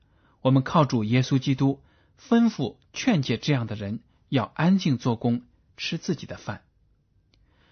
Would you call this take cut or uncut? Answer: uncut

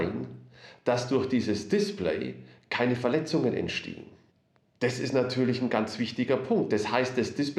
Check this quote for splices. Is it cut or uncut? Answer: uncut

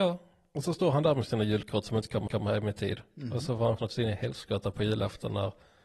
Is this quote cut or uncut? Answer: cut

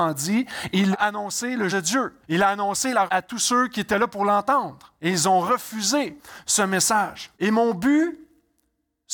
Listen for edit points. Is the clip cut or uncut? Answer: cut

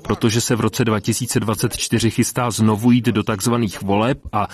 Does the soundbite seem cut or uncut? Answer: uncut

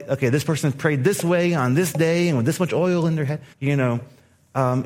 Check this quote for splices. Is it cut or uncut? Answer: cut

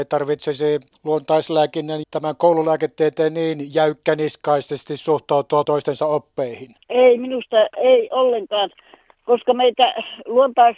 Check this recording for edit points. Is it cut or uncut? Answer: cut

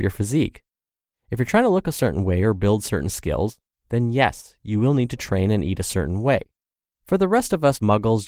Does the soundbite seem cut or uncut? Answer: uncut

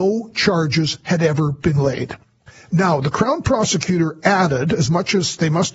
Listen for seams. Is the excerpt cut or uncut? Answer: uncut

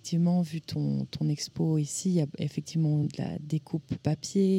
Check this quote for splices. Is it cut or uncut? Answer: uncut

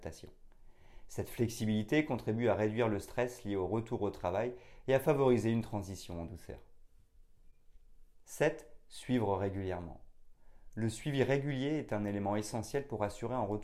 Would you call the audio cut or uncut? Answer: uncut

